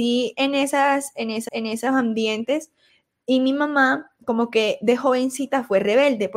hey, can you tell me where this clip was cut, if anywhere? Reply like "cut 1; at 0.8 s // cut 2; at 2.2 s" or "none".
cut 1; at 1.5 s